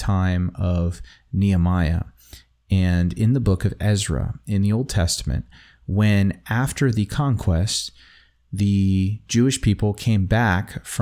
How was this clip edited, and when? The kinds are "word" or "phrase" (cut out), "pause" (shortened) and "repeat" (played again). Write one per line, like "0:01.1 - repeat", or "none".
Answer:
none